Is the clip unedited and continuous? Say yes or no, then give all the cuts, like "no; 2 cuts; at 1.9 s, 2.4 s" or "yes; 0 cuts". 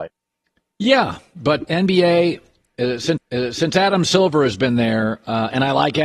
no; 2 cuts; at 1.6 s, 3.2 s